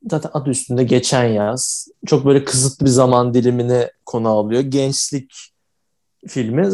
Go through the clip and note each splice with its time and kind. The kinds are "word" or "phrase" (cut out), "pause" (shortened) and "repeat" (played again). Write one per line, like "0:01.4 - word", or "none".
none

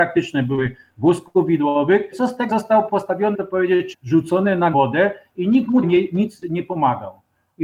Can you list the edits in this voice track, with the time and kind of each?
0:02.1 - word
0:02.5 - word
0:02.9 - word
0:03.3 - word
0:03.9 - word
0:04.7 - word
0:05.8 - word

